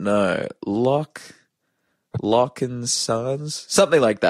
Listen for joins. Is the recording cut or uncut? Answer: uncut